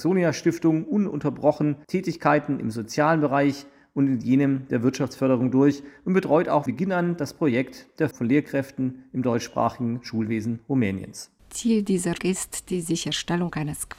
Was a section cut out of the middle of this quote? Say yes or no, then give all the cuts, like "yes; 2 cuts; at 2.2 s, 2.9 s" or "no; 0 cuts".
yes; 3 cuts; at 6.7 s, 8.1 s, 12.2 s